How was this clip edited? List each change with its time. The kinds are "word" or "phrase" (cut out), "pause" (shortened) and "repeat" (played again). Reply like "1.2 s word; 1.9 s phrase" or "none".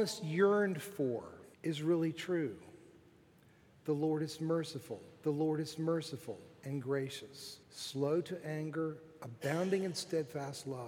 1.5 s pause; 5.2 s repeat; 7.6 s pause